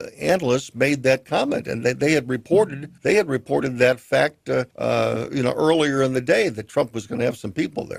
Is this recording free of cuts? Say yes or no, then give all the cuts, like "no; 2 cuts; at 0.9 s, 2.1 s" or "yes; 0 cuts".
no; 2 cuts; at 3.0 s, 4.7 s